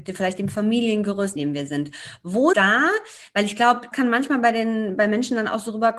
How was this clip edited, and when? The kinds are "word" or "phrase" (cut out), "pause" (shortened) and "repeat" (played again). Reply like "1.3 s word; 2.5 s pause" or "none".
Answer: 1.4 s phrase; 2.5 s word; 3.9 s word